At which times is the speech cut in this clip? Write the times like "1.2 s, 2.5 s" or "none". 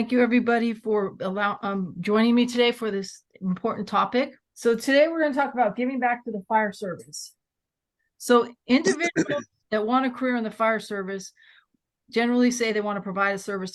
4.5 s, 9.6 s

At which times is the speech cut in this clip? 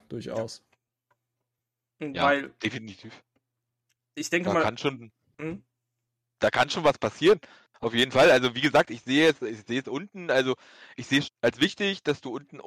11.3 s

